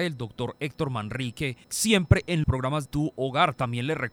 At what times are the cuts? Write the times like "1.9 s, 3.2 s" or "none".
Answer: 1.6 s, 2.4 s, 2.9 s